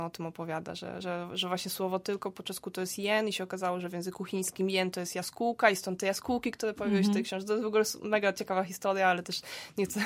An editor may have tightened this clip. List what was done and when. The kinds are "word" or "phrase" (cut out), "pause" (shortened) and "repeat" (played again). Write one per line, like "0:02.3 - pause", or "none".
0:01.0 - word